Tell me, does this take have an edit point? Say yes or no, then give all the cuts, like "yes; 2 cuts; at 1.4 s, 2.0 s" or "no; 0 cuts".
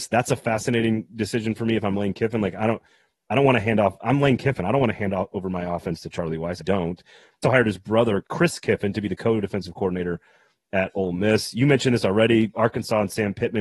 yes; 3 cuts; at 6.6 s, 7.4 s, 8.2 s